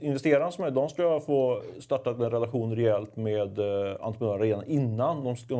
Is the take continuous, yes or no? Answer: yes